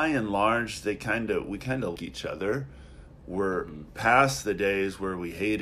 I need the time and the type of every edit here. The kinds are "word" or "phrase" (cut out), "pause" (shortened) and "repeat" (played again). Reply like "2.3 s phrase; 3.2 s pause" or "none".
2.0 s word